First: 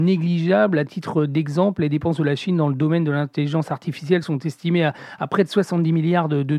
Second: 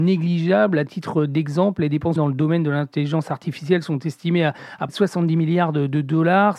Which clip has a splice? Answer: second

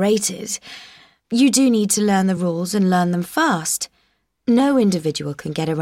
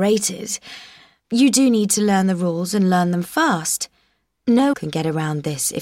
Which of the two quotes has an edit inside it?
second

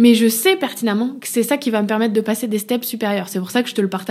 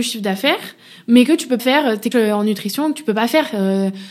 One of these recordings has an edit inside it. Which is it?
second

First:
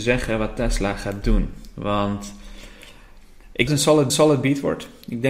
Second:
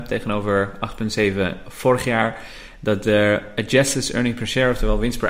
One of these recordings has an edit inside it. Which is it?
first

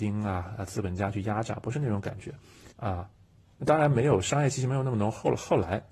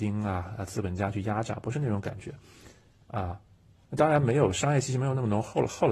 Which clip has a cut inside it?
first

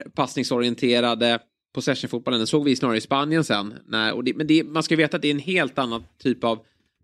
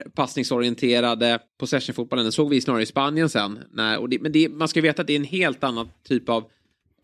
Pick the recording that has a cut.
second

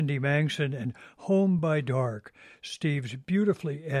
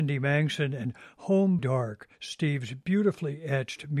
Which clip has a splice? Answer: second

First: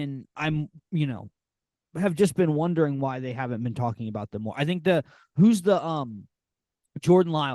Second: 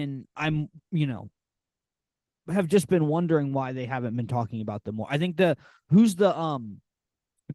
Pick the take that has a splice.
first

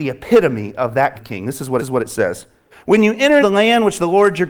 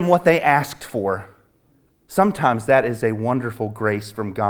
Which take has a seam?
first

